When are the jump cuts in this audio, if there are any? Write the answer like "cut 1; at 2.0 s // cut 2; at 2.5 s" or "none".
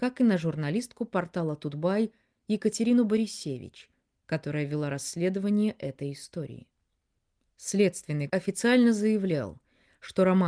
cut 1; at 8.3 s